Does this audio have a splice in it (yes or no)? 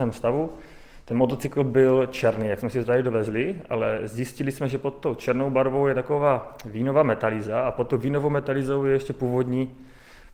no